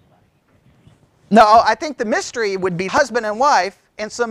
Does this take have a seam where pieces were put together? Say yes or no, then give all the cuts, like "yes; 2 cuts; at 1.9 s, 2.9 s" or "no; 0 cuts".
yes; 1 cut; at 2.9 s